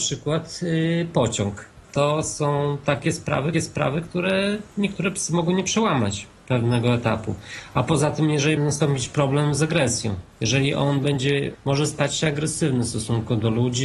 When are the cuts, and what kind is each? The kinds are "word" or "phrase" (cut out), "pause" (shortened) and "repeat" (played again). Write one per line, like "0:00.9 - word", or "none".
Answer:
0:01.8 - pause
0:03.5 - repeat
0:08.6 - phrase
0:10.3 - pause
0:11.5 - word